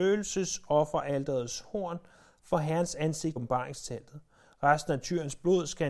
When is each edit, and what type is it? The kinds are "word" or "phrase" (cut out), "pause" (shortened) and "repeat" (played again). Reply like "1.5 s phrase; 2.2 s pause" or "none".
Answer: 3.4 s word